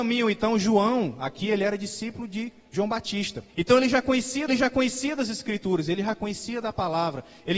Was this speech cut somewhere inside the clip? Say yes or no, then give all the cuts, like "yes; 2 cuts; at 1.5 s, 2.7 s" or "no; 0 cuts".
yes; 2 cuts; at 3.5 s, 4.5 s